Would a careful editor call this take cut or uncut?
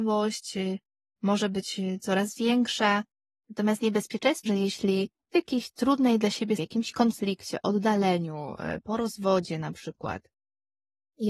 cut